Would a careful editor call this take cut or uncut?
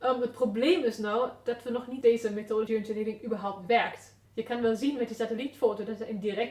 cut